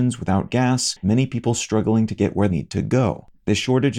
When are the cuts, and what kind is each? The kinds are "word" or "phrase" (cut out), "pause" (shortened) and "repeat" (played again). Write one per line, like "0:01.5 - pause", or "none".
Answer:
0:01.0 - word
0:02.5 - word